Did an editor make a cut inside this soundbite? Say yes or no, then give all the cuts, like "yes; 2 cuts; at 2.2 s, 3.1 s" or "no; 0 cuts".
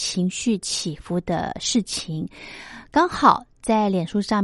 no; 0 cuts